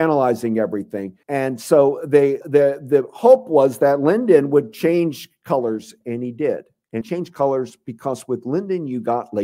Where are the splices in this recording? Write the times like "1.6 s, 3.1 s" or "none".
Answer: 1.2 s, 2.4 s, 7.0 s